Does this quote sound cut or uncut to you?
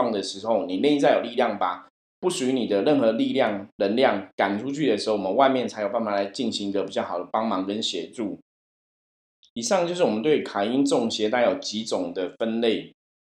uncut